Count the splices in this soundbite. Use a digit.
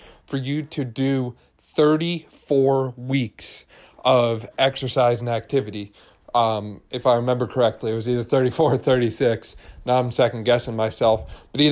0